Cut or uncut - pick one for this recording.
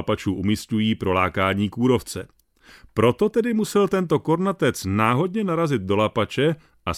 uncut